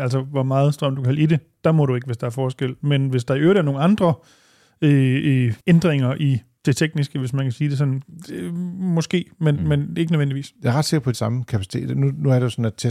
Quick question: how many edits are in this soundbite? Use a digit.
2